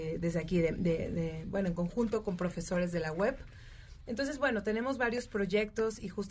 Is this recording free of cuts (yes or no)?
yes